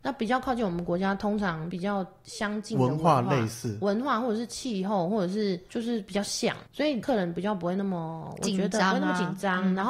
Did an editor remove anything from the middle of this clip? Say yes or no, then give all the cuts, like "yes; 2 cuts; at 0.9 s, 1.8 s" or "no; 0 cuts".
yes; 1 cut; at 6.7 s